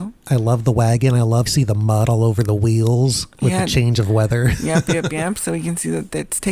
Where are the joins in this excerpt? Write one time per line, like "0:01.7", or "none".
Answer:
0:01.5